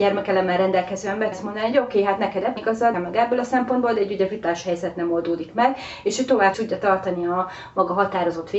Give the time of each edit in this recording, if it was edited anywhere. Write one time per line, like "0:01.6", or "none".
0:01.3
0:02.6
0:02.9
0:06.5